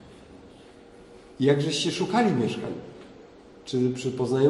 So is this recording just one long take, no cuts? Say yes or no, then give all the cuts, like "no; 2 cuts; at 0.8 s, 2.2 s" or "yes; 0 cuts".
yes; 0 cuts